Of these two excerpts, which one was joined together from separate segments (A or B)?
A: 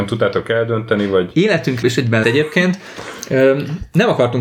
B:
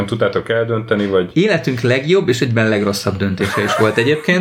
A